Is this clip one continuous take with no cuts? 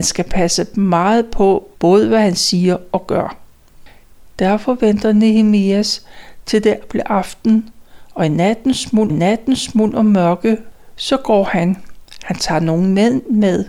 no; 2 cuts; at 1.8 s, 9.1 s

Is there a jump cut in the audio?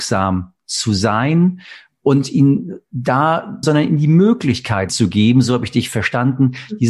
yes; 2 cuts; at 3.6 s, 4.9 s

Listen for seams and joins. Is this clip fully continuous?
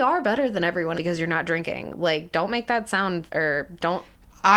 no; 2 cuts; at 0.9 s, 3.3 s

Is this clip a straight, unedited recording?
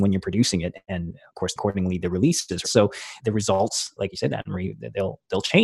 no; 5 cuts; at 1.6 s, 2.0 s, 2.6 s, 3.2 s, 4.0 s

